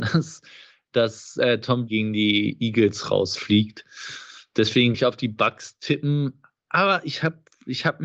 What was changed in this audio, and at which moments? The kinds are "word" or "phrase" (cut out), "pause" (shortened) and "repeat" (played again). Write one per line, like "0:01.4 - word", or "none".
0:01.9 - word
0:04.9 - word